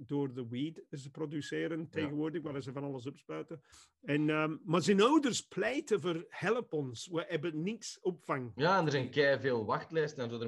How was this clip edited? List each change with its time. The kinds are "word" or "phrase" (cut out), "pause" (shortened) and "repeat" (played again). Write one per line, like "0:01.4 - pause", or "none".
0:03.7 - pause